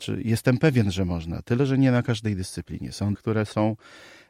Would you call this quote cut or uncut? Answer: cut